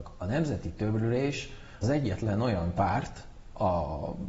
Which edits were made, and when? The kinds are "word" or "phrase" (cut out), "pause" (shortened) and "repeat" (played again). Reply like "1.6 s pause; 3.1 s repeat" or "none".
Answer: 1.8 s word